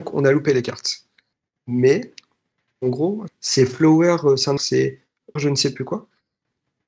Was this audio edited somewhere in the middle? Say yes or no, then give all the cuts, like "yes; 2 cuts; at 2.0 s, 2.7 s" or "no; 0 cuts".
yes; 3 cuts; at 3.3 s, 4.6 s, 5.4 s